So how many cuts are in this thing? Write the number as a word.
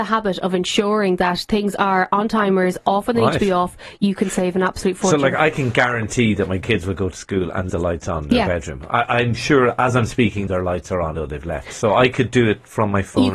three